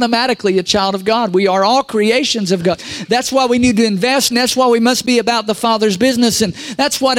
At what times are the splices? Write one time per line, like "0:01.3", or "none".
0:04.3